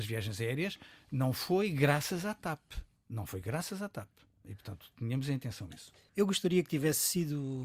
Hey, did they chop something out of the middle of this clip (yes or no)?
no